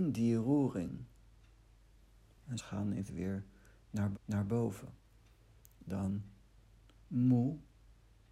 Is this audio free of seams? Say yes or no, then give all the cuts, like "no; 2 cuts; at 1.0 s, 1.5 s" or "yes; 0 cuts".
no; 3 cuts; at 2.6 s, 3.1 s, 4.1 s